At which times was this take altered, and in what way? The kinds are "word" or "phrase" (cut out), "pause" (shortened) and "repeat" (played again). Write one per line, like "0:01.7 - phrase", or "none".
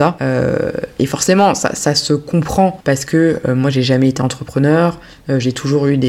none